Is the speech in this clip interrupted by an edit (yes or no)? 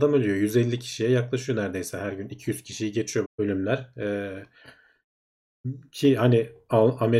yes